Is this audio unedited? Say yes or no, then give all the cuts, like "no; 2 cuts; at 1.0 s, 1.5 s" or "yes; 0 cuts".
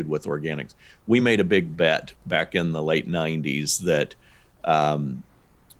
yes; 0 cuts